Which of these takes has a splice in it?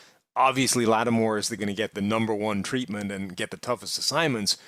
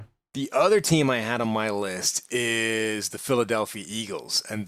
first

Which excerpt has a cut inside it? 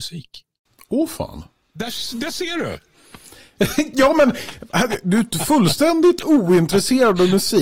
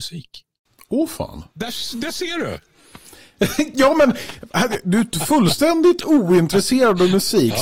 second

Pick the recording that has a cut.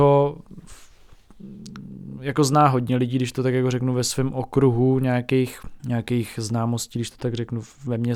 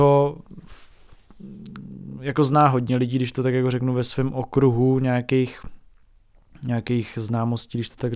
first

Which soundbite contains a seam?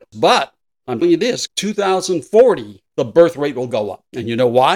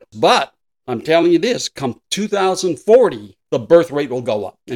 first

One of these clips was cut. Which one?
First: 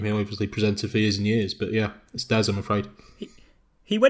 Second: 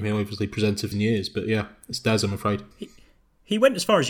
second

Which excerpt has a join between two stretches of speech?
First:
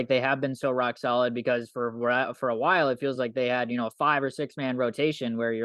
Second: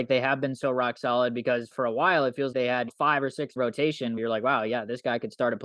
second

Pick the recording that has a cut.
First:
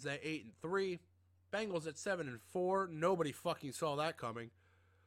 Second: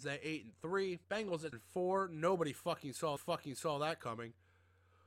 second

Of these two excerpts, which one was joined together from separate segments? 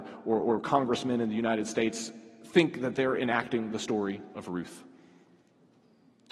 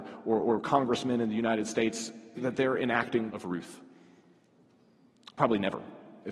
second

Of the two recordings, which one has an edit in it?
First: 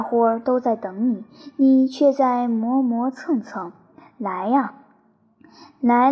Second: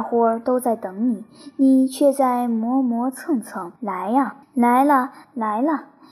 second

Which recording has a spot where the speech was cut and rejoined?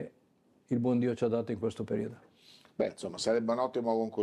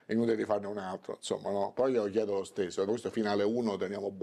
second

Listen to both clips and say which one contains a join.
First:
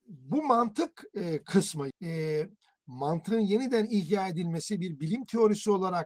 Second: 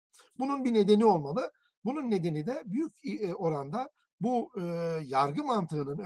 first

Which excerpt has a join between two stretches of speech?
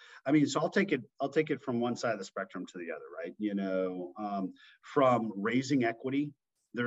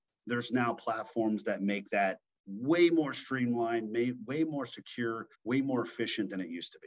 second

